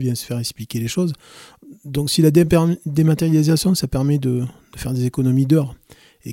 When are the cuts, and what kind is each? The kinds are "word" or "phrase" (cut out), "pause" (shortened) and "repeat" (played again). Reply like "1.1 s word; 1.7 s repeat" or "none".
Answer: none